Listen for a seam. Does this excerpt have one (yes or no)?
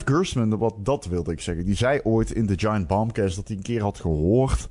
no